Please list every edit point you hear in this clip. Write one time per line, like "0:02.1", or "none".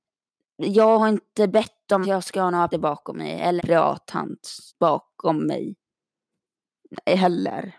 0:02.0
0:02.7
0:03.6
0:04.7